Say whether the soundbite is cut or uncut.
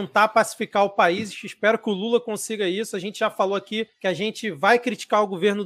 uncut